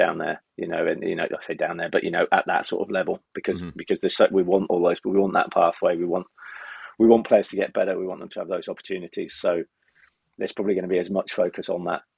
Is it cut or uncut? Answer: uncut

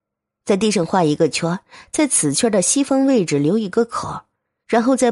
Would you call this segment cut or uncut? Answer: uncut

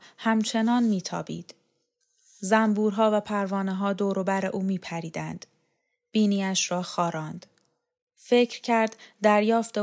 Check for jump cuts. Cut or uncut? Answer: uncut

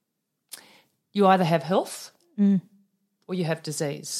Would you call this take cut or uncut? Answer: uncut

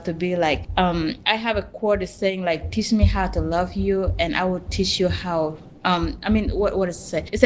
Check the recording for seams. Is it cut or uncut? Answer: uncut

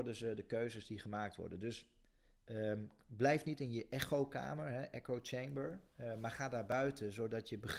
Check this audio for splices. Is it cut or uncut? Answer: uncut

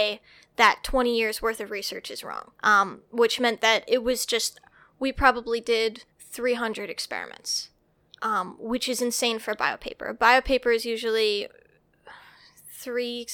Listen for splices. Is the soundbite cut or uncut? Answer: cut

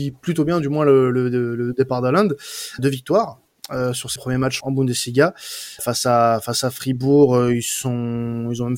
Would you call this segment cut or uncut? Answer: cut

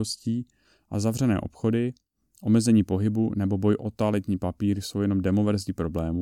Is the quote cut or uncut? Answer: uncut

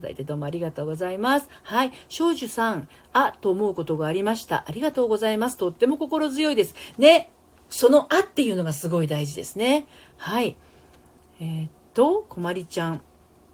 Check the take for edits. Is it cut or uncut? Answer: uncut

